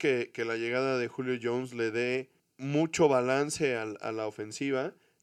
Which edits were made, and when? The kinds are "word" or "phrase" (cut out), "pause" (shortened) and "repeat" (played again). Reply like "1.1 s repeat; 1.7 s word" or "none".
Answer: none